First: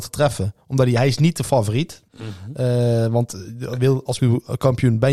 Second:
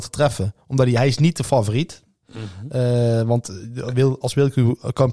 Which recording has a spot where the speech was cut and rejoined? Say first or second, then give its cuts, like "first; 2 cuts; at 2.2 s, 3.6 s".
first; 2 cuts; at 2.1 s, 4.2 s